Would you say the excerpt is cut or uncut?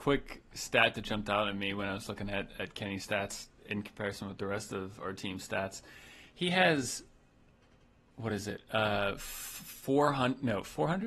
uncut